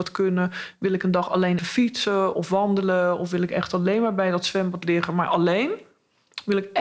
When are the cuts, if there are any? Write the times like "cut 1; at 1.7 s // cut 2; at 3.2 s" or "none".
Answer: cut 1; at 1.6 s